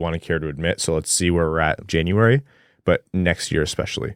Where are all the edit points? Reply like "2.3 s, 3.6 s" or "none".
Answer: 1.8 s